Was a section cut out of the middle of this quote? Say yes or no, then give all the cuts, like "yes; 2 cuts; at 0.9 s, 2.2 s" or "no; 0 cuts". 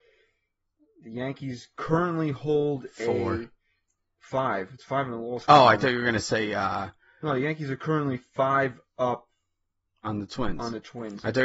no; 0 cuts